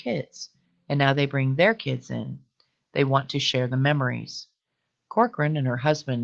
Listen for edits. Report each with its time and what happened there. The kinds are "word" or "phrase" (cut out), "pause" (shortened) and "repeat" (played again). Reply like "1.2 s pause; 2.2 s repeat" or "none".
none